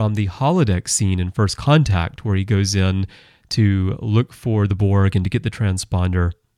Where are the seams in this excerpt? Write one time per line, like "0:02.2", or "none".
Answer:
none